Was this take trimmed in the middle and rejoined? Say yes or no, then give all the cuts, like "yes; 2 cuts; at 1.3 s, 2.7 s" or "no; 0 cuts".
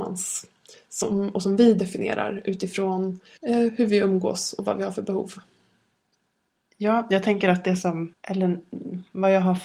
no; 0 cuts